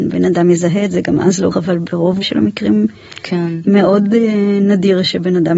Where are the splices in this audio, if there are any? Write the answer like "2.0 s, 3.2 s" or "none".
1.5 s, 2.2 s